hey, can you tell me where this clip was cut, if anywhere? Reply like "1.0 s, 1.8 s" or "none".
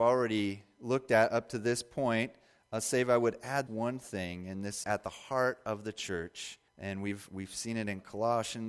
3.7 s, 4.8 s, 6.7 s